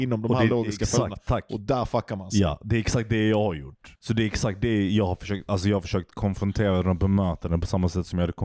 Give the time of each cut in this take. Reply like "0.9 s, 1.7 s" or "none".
4.0 s